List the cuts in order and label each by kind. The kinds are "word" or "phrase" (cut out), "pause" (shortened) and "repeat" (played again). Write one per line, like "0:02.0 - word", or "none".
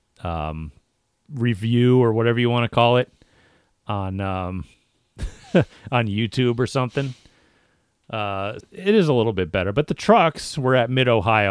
0:04.7 - pause
0:08.6 - word